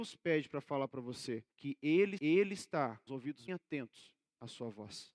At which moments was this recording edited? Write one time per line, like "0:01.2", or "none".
0:01.5
0:02.2
0:03.1
0:03.5